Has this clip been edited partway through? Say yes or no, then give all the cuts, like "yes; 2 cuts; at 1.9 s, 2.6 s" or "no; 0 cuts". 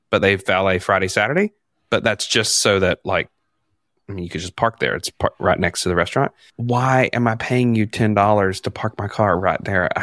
no; 0 cuts